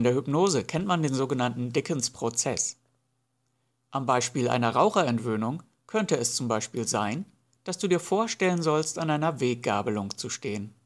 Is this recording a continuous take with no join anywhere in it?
yes; 0 cuts

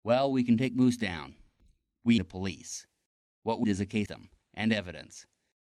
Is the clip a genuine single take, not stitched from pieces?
no; 3 cuts; at 2.2 s, 3.6 s, 4.1 s

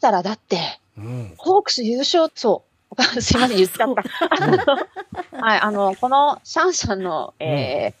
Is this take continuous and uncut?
no; 1 cut; at 2.3 s

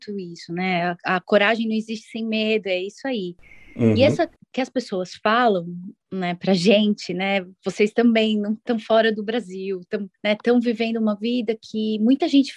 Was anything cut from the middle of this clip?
yes; 1 cut; at 10.2 s

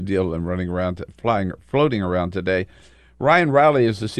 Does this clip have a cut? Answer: no; 0 cuts

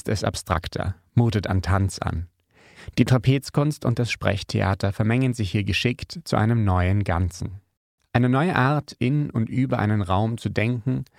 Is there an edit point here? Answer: no; 0 cuts

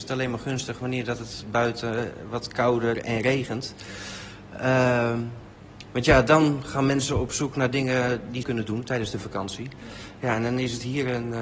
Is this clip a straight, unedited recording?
no; 1 cut; at 8.4 s

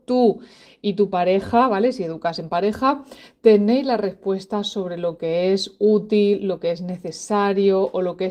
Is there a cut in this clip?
no; 0 cuts

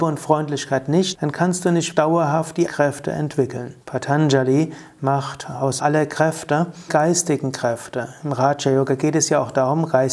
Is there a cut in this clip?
yes; 6 cuts; at 1.1 s, 1.9 s, 2.7 s, 3.8 s, 5.8 s, 6.9 s

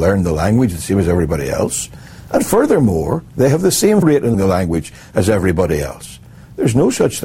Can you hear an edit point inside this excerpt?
yes; 3 cuts; at 3.3 s, 4.0 s, 4.3 s

